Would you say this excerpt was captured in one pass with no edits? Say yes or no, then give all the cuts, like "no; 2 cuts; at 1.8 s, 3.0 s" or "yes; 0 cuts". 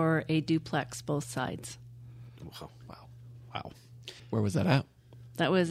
no; 1 cut; at 4.2 s